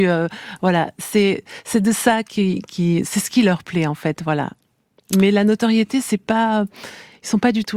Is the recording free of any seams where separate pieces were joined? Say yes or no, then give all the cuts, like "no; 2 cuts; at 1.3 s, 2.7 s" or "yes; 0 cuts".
yes; 0 cuts